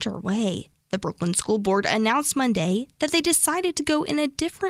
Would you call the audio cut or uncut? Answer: uncut